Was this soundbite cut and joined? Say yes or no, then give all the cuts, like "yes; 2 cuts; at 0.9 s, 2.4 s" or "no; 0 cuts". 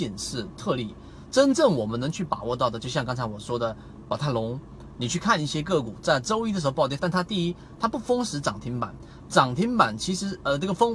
yes; 1 cut; at 7.0 s